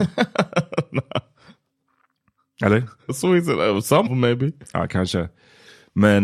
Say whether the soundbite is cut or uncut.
cut